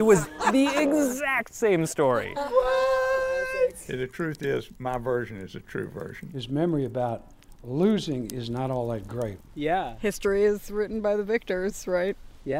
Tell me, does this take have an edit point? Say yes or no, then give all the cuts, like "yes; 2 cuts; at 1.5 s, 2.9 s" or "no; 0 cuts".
no; 0 cuts